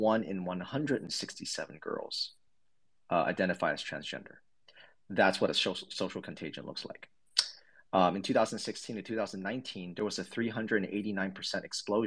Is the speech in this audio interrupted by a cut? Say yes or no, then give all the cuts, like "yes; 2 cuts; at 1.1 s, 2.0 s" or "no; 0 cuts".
no; 0 cuts